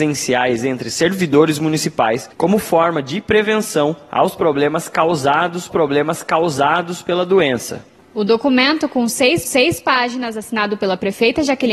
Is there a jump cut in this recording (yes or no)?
yes